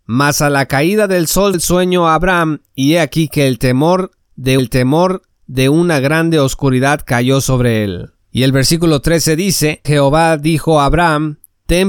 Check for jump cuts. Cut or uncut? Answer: cut